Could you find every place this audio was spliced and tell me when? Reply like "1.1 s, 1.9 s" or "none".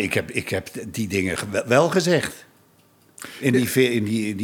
none